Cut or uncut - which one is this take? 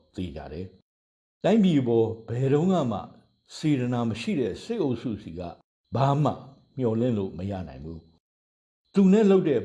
uncut